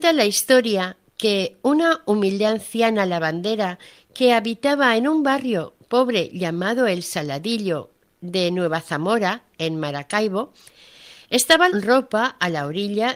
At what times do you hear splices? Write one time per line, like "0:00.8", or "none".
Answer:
0:11.7